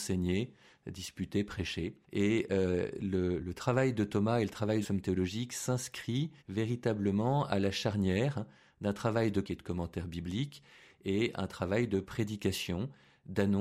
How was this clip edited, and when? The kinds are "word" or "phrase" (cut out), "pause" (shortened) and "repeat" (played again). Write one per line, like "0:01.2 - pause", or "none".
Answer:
0:03.4 - word
0:04.8 - phrase
0:06.4 - pause
0:09.4 - phrase